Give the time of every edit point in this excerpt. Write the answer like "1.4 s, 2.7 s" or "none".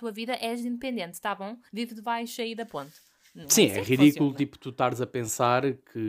none